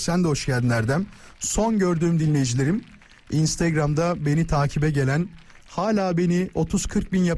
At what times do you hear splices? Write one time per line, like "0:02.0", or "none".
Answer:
none